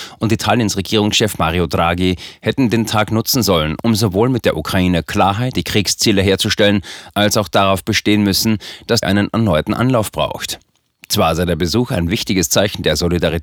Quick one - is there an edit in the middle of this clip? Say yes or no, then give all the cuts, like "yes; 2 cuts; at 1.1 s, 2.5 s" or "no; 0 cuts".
yes; 2 cuts; at 5.5 s, 9.0 s